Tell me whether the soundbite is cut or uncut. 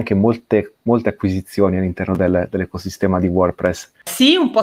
uncut